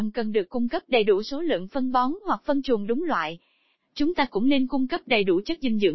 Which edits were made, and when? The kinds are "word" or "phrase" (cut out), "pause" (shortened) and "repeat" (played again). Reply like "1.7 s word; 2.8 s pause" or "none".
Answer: none